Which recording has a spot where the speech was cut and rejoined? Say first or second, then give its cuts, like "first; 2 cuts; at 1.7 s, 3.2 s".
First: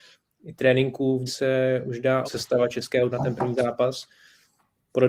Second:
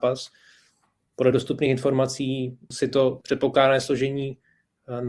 first; 3 cuts; at 1.3 s, 2.2 s, 3.1 s